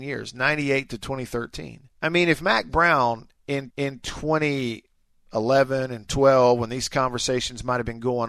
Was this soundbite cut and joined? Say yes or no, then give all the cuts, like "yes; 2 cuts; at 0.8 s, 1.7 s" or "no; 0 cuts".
yes; 2 cuts; at 1.9 s, 3.7 s